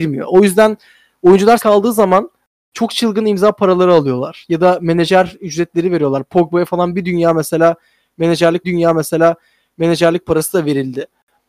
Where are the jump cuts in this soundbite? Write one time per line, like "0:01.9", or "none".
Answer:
0:01.6
0:08.6